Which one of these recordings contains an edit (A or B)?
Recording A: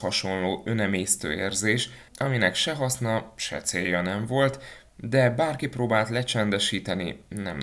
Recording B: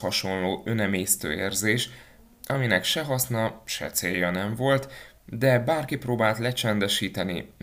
A